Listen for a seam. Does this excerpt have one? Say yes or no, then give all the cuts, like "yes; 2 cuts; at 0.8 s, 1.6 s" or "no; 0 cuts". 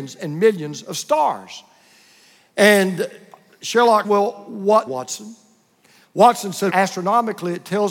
yes; 3 cuts; at 4.0 s, 4.9 s, 6.7 s